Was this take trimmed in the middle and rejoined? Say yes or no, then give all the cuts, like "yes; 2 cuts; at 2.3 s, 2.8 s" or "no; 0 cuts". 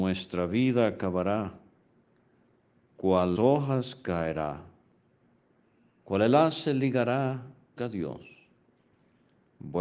yes; 2 cuts; at 3.4 s, 7.8 s